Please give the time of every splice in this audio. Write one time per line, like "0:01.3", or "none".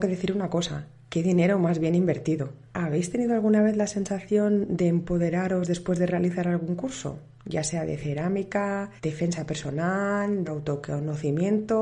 0:02.6
0:09.0
0:10.5